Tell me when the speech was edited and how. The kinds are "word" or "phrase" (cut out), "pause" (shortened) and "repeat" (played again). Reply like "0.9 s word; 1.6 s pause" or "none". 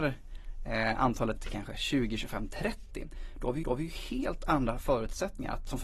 1.4 s word; 3.6 s repeat